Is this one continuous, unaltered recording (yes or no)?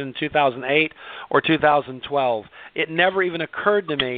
yes